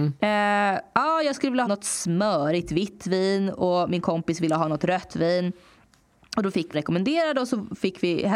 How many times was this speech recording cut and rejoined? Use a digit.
2